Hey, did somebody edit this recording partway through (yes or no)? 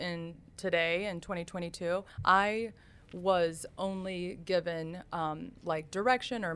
yes